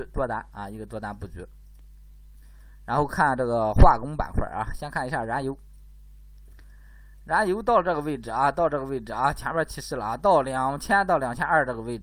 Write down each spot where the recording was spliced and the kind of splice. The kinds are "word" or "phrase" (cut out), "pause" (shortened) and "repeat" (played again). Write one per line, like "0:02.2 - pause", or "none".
none